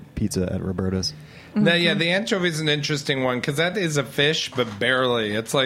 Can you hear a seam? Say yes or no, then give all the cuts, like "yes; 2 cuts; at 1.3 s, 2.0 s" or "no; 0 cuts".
no; 0 cuts